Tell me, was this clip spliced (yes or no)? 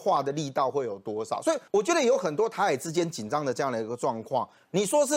yes